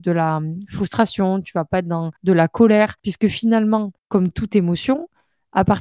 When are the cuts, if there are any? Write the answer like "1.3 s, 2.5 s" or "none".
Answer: 2.2 s, 3.0 s, 4.0 s